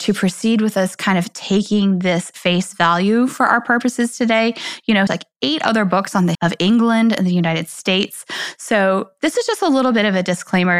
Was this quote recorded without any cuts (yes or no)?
no